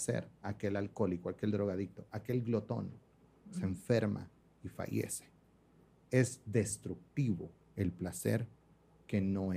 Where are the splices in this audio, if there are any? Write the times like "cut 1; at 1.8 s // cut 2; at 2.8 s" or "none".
none